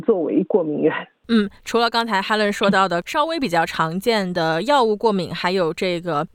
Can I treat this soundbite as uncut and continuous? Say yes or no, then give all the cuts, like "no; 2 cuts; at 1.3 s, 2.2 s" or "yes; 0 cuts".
no; 1 cut; at 1.2 s